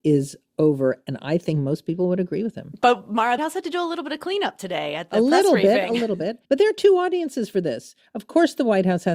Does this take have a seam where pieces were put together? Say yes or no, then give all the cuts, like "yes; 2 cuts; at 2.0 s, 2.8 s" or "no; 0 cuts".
yes; 2 cuts; at 3.4 s, 6.4 s